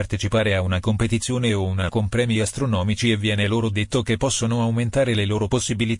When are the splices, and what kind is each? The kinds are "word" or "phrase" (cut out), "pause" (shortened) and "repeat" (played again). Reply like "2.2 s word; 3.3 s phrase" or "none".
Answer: 1.9 s word